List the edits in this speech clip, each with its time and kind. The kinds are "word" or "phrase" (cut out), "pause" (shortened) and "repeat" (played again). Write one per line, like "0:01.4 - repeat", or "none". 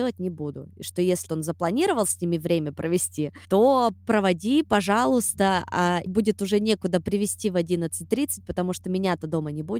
0:01.3 - word
0:06.1 - word